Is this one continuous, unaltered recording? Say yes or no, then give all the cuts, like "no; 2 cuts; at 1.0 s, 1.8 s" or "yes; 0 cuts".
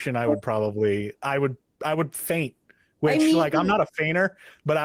yes; 0 cuts